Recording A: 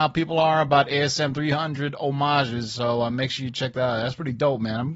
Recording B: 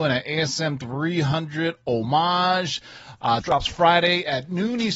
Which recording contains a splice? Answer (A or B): B